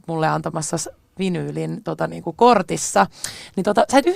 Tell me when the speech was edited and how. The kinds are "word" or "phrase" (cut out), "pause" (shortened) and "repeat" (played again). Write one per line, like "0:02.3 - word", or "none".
none